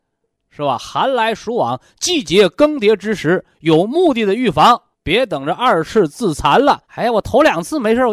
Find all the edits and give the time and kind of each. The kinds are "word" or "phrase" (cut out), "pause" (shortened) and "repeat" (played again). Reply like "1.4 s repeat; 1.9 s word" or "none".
4.9 s pause; 6.8 s pause